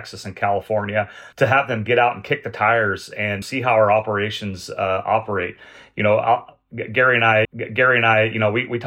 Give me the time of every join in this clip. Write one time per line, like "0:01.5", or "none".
0:01.3
0:03.4
0:07.4